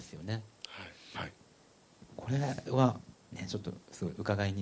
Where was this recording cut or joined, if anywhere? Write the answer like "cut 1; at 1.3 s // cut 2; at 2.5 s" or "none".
cut 1; at 1.1 s